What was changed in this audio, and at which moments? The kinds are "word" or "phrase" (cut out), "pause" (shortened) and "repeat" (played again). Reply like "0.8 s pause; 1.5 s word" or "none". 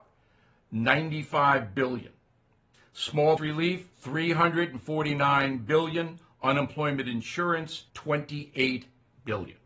3.4 s word; 3.9 s pause; 7.9 s pause